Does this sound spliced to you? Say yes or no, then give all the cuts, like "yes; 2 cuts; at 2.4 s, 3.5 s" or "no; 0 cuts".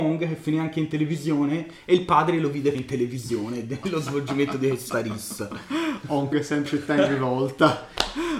yes; 3 cuts; at 2.7 s, 6.3 s, 6.7 s